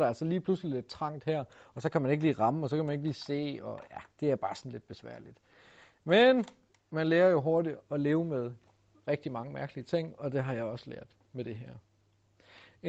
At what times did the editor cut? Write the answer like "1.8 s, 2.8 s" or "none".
none